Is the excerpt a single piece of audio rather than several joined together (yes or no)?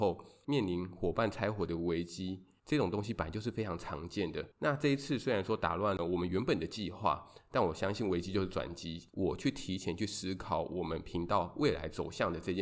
no